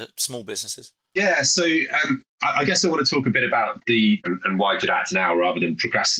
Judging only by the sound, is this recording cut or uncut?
cut